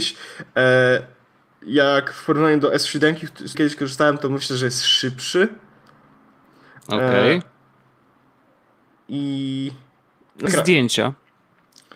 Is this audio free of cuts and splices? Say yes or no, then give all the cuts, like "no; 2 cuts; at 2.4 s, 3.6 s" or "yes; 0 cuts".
no; 2 cuts; at 3.5 s, 10.5 s